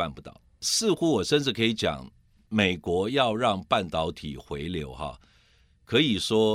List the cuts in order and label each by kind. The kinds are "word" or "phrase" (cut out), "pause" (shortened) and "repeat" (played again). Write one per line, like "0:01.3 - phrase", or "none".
none